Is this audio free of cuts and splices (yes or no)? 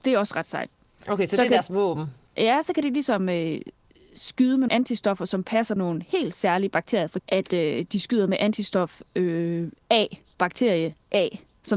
no